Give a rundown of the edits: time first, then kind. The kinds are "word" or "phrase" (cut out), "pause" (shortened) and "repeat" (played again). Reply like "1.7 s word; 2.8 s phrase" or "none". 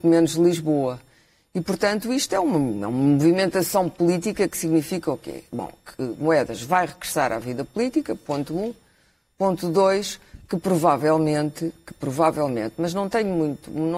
none